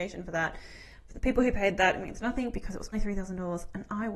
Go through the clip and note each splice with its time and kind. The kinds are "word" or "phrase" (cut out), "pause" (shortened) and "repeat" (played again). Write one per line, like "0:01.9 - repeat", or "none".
0:02.9 - word